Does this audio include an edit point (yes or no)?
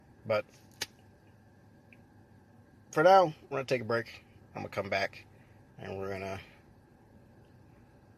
no